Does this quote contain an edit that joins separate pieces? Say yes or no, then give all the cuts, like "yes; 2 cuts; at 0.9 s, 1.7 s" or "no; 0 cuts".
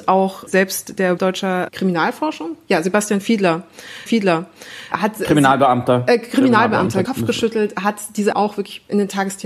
yes; 4 cuts; at 1.2 s, 4.1 s, 7.0 s, 8.3 s